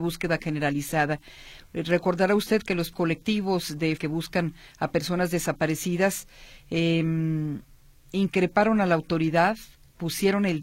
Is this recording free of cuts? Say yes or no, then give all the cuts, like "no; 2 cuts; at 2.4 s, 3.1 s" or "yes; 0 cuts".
no; 2 cuts; at 2.9 s, 4.0 s